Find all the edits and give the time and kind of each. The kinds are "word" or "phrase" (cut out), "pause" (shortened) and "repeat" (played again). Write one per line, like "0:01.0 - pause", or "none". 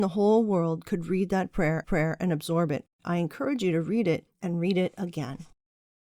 0:01.8 - repeat
0:02.9 - pause